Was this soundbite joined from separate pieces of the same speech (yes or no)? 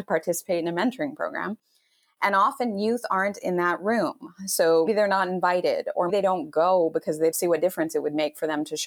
yes